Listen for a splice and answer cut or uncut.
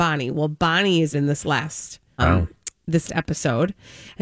cut